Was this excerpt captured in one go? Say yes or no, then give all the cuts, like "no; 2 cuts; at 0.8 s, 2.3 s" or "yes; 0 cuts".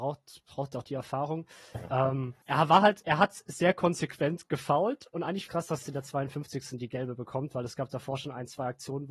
no; 3 cuts; at 2.4 s, 5.5 s, 5.8 s